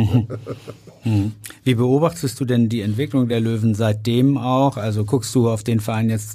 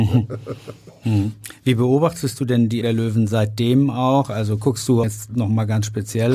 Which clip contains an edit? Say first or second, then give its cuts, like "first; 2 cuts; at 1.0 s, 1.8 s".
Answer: second; 2 cuts; at 2.8 s, 5.0 s